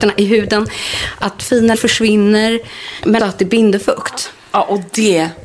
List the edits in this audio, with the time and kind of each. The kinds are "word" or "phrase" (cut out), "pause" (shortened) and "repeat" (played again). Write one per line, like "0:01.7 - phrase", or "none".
0:01.7 - word
0:03.2 - word